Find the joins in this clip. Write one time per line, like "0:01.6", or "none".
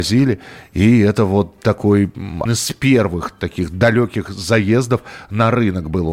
0:02.5